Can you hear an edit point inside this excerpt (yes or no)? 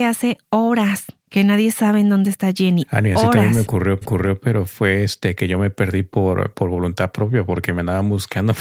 yes